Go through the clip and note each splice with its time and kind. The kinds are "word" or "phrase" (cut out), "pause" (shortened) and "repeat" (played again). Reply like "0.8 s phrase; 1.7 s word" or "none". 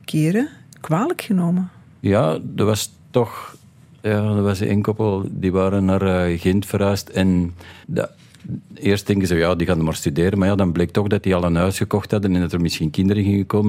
7.8 s pause